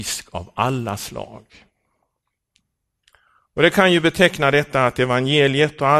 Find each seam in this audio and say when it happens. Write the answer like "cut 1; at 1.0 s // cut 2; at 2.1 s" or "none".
none